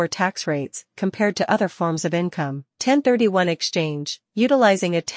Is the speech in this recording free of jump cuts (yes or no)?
no